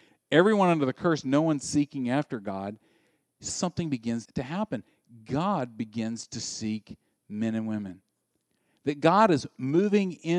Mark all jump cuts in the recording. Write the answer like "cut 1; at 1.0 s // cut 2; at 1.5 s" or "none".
cut 1; at 3.5 s // cut 2; at 4.3 s